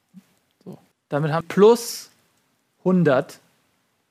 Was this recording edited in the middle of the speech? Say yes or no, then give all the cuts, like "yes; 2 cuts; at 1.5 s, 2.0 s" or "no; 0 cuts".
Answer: yes; 2 cuts; at 0.9 s, 1.4 s